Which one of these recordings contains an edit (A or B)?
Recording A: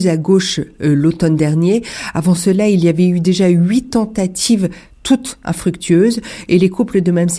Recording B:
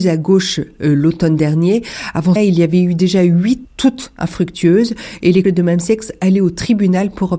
B